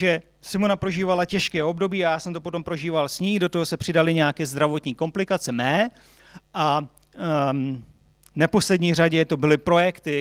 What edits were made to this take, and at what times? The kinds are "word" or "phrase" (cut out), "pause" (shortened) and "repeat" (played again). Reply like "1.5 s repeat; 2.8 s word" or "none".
none